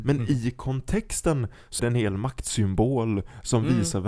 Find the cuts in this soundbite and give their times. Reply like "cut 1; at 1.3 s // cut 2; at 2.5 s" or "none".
cut 1; at 1.8 s